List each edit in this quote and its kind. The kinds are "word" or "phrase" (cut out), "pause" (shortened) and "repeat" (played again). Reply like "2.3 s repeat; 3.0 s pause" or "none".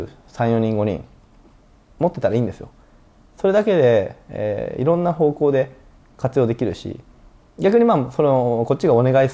none